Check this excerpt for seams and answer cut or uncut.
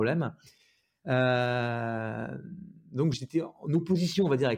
cut